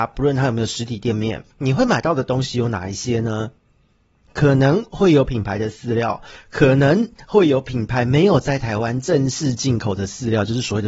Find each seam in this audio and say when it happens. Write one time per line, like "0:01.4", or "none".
0:01.5